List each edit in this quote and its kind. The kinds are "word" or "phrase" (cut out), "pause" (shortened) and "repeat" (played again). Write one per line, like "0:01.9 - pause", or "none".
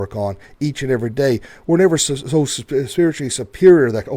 none